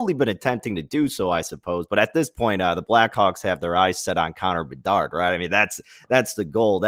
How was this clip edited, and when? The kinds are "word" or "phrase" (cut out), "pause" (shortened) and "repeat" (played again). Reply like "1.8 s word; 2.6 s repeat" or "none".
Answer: none